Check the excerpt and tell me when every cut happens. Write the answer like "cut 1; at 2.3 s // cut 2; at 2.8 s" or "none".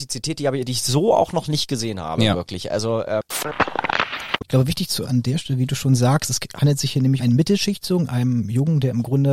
cut 1; at 5.0 s // cut 2; at 7.2 s